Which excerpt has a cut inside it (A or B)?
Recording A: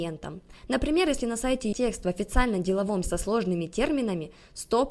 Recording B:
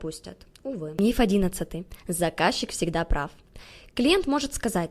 A